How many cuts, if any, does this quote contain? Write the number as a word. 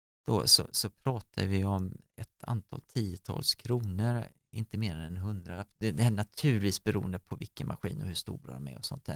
zero